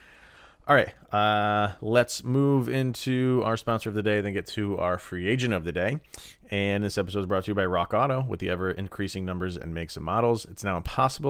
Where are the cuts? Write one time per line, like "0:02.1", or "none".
none